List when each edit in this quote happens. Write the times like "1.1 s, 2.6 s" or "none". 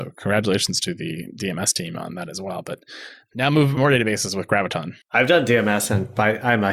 3.8 s, 5.0 s